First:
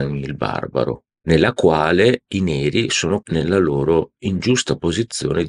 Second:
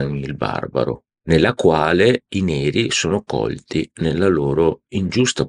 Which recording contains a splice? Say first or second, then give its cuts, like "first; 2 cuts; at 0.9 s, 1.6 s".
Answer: first; 1 cut; at 3.2 s